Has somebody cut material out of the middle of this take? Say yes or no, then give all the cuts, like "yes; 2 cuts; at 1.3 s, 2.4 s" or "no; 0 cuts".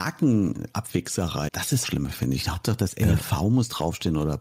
yes; 2 cuts; at 1.5 s, 1.8 s